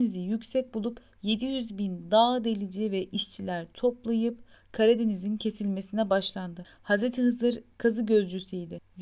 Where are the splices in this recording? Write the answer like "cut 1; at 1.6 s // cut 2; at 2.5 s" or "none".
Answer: none